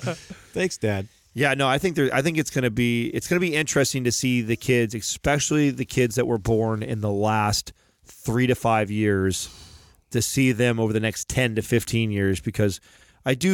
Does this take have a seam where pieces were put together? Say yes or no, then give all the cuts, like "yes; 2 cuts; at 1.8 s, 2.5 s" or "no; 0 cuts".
no; 0 cuts